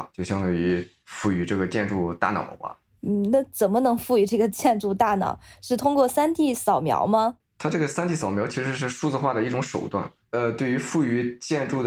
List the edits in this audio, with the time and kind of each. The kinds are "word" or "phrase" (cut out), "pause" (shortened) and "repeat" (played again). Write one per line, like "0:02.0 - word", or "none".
none